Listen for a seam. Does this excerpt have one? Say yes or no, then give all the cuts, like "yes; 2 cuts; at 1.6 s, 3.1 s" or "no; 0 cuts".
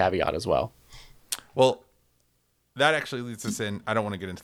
no; 0 cuts